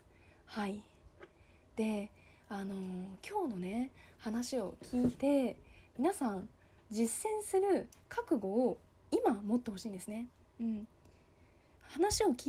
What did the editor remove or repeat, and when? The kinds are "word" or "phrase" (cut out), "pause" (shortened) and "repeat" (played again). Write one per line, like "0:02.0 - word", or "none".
none

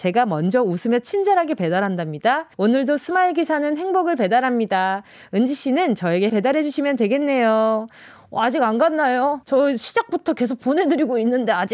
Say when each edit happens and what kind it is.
0:02.5 - pause
0:06.3 - word
0:09.4 - pause

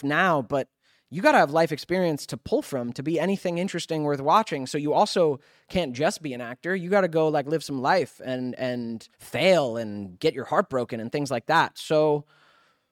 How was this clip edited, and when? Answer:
0:09.1 - pause

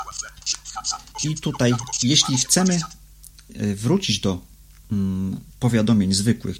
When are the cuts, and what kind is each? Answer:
none

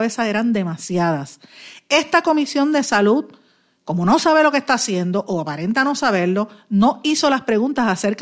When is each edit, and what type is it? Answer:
none

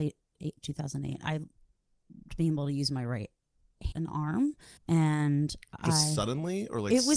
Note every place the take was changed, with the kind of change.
0:02.3 - word
0:03.9 - word
0:04.8 - pause

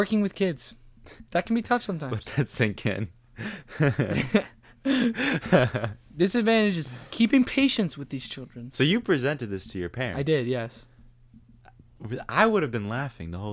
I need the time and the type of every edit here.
0:01.3 - pause

